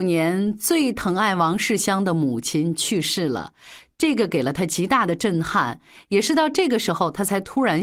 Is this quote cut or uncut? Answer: uncut